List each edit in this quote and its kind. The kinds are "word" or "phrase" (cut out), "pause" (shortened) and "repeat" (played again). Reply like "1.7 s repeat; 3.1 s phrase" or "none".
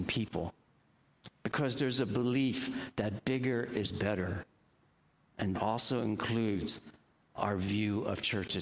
5.5 s word

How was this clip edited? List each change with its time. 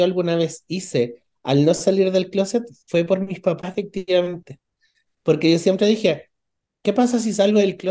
none

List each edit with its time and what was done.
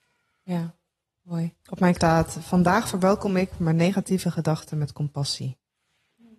1.6 s pause; 1.9 s word

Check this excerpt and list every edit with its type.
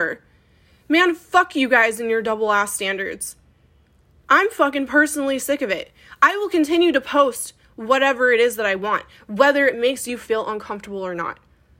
none

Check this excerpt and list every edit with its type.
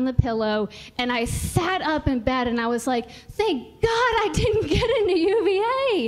none

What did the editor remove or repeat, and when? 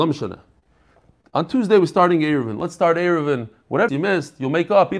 3.9 s phrase

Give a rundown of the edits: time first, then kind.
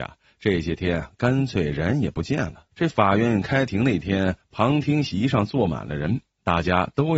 2.7 s pause

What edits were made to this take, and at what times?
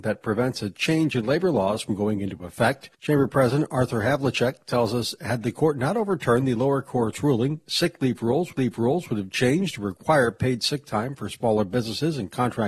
2.9 s pause; 8.5 s repeat

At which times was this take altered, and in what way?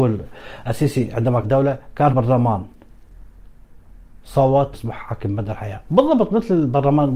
1.4 s word; 2.1 s word; 4.7 s phrase

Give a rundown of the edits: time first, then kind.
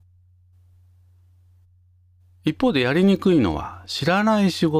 none

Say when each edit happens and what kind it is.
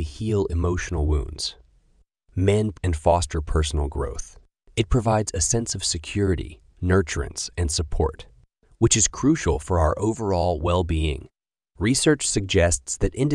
2.7 s phrase

